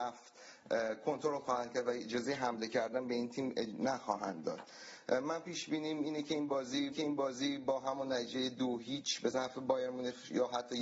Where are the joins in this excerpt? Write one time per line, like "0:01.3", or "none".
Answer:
0:06.9